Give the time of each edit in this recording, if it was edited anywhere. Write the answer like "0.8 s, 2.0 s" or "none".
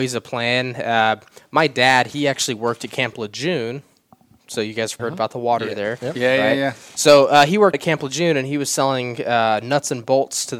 5.0 s, 7.7 s